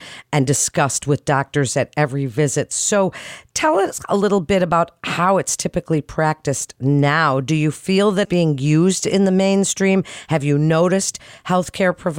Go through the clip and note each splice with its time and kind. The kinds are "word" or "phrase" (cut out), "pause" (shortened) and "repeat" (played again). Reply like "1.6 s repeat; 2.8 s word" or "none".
8.2 s word